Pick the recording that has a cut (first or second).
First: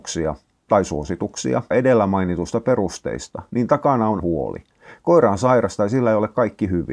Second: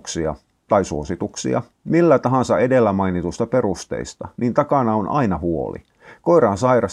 first